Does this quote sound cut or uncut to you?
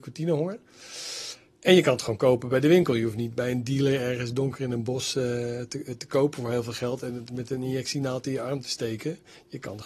uncut